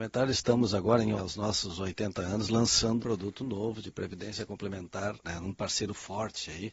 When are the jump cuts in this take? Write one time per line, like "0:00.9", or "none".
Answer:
0:01.2
0:03.0
0:05.2